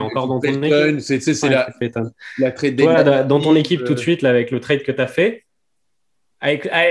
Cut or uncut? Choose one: uncut